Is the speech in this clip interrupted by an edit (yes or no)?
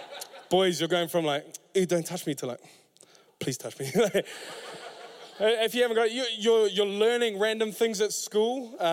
no